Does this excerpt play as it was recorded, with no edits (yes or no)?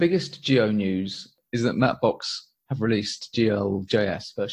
yes